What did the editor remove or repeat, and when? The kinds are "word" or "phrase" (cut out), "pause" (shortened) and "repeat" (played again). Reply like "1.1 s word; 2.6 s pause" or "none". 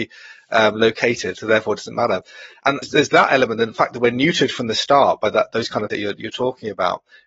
2.8 s word; 5.9 s word